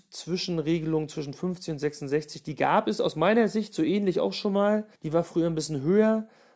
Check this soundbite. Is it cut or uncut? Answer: cut